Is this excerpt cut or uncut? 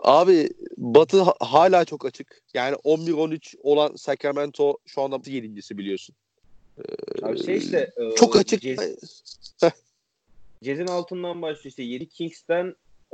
cut